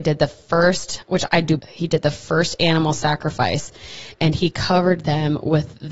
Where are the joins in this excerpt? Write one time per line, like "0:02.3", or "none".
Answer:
0:01.3
0:01.6